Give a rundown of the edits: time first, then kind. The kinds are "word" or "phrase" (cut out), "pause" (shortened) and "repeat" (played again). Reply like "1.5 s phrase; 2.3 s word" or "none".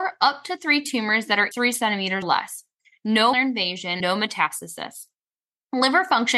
1.5 s word; 2.2 s word; 3.3 s word; 4.0 s word

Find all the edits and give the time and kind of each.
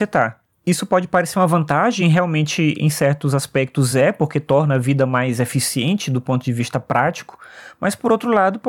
none

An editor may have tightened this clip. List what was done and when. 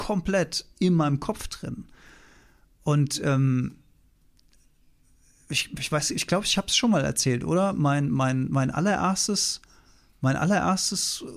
none

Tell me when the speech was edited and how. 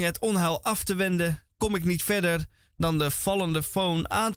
none

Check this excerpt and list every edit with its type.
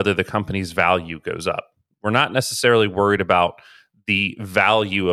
none

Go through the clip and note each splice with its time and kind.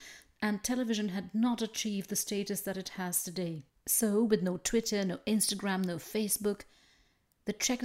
none

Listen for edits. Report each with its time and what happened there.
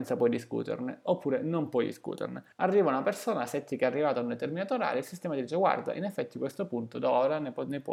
2.5 s pause

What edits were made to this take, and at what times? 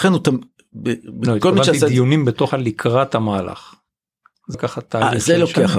2.5 s word; 4.5 s word

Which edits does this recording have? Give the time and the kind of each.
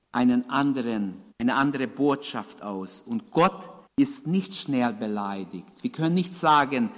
1.3 s pause; 3.9 s pause

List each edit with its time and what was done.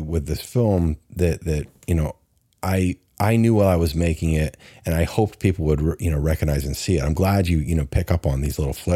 none

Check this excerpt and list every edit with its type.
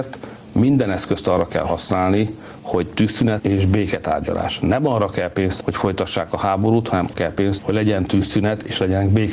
3.4 s word; 5.6 s word; 7.1 s word; 7.6 s word

